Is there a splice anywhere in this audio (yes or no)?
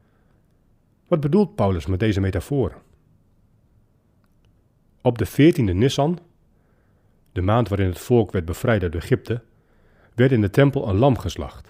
no